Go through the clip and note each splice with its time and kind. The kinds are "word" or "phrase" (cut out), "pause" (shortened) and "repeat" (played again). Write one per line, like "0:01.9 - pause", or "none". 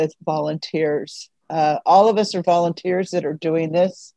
0:01.4 - pause